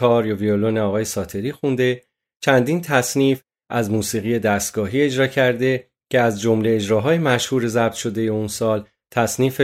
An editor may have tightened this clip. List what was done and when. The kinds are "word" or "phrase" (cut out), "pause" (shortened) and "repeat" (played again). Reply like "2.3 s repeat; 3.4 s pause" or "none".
none